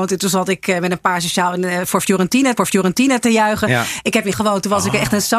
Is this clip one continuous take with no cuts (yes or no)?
no